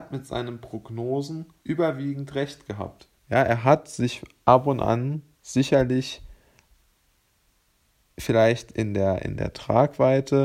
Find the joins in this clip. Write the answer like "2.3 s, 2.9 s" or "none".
1.6 s, 3.2 s, 5.4 s